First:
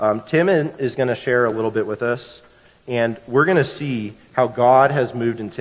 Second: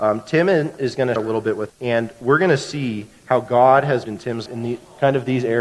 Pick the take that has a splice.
second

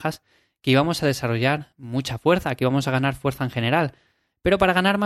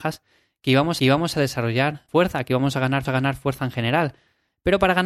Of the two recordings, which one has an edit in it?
second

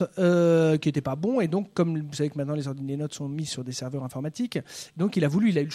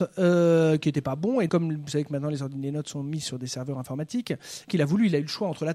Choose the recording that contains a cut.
second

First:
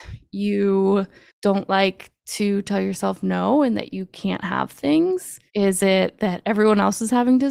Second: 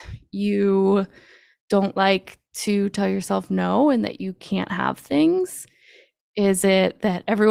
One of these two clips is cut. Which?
first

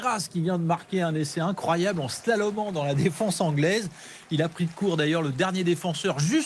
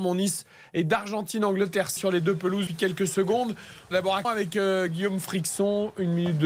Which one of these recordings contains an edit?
second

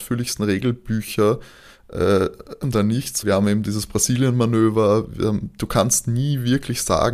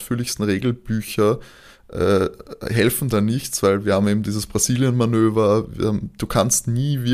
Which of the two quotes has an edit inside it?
first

